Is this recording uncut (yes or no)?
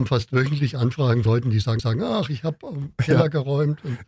no